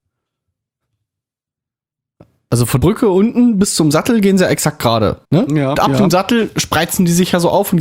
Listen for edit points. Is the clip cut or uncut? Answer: cut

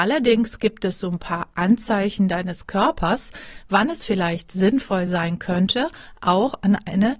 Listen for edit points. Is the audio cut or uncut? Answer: uncut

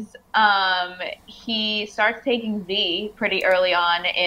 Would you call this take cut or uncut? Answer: uncut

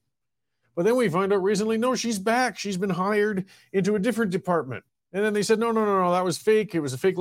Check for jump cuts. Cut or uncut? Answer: cut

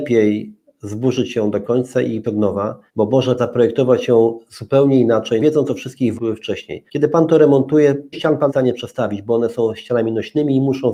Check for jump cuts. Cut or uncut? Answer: cut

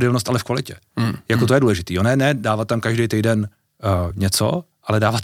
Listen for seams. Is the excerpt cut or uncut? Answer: uncut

